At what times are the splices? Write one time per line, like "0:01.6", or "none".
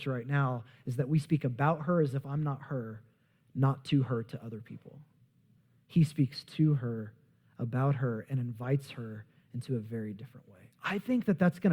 none